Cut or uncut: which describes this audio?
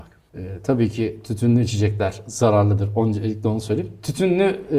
uncut